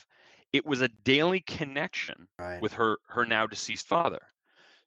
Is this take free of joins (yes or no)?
no